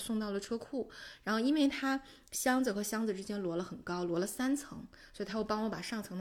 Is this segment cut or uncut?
uncut